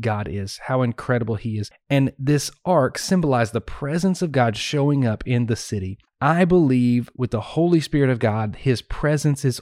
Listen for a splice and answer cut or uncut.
cut